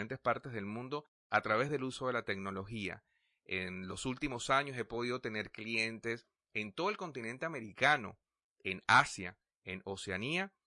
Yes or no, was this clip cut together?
no